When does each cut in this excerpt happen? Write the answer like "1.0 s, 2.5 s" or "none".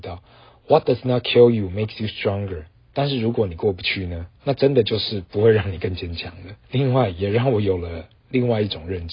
4.4 s, 6.6 s